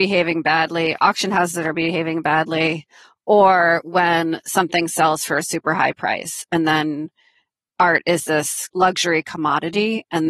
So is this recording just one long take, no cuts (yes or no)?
yes